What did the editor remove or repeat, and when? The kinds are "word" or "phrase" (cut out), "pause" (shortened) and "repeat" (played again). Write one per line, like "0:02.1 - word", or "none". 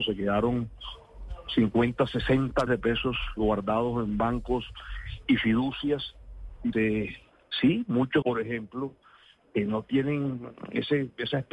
0:02.7 - word
0:06.7 - word
0:08.2 - phrase